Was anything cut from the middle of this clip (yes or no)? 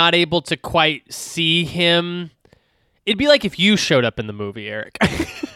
no